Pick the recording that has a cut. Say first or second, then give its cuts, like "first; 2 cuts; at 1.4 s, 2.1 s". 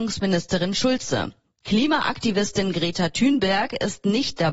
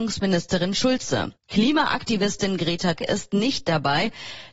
second; 2 cuts; at 1.4 s, 3.0 s